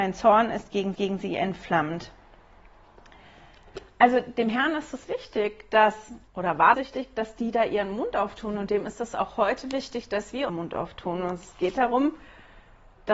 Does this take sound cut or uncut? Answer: cut